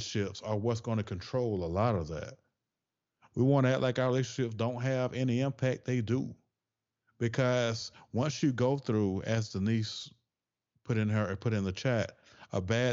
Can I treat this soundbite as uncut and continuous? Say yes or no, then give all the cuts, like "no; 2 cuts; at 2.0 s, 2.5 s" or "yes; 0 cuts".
yes; 0 cuts